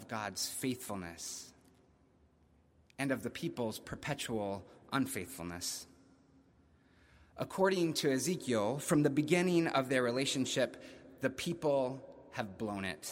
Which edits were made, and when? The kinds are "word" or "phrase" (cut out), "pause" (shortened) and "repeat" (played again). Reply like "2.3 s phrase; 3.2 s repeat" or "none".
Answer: none